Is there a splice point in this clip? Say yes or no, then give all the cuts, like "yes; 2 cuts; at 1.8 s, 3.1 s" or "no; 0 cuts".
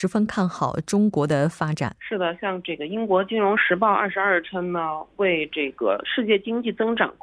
yes; 1 cut; at 2.0 s